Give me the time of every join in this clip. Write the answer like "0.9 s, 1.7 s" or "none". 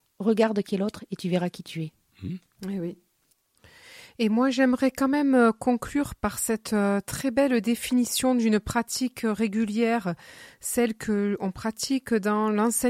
none

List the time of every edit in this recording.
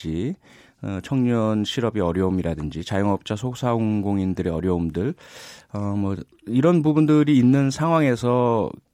none

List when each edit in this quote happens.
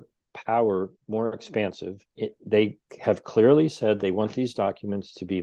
1.0 s, 2.1 s

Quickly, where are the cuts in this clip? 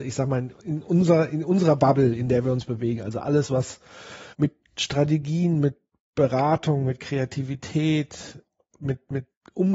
4.3 s

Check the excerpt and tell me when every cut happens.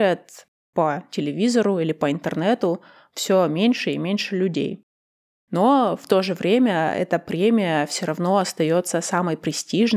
none

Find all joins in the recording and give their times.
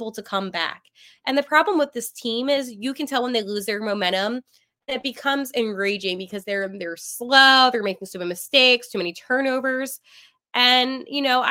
none

